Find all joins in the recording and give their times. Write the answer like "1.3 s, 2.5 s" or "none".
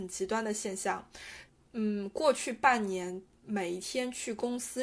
1.5 s